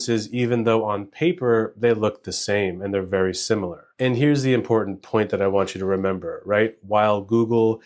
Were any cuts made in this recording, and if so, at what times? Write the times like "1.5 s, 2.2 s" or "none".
none